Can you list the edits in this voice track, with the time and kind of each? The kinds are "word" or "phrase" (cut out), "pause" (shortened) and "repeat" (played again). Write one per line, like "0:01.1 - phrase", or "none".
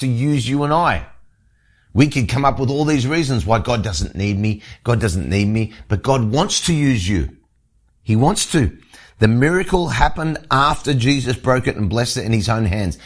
none